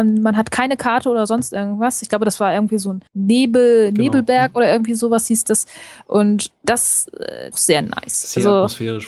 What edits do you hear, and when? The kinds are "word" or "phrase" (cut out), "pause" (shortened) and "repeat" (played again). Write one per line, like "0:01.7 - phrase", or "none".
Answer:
0:03.1 - pause
0:06.5 - word
0:07.5 - phrase

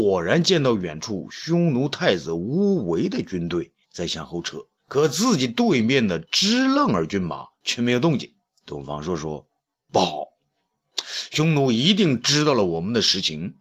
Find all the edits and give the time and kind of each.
0:03.8 - pause
0:04.8 - pause
0:07.5 - pause
0:08.5 - pause
0:09.6 - pause

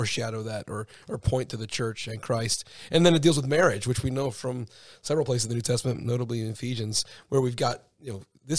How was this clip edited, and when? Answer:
none

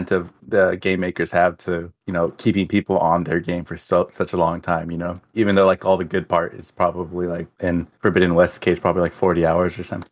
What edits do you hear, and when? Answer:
none

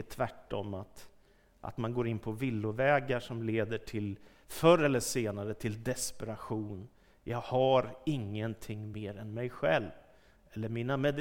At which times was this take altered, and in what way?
none

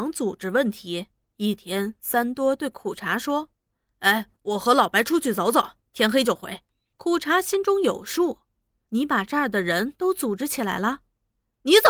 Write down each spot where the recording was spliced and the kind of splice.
0:06.7 - pause

